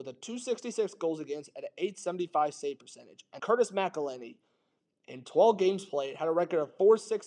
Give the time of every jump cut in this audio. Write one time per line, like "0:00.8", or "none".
0:03.4